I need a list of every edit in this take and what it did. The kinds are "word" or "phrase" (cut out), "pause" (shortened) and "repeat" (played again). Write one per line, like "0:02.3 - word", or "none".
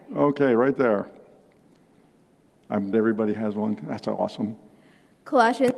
0:02.9 - word